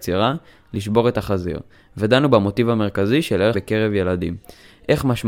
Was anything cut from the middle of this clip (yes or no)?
yes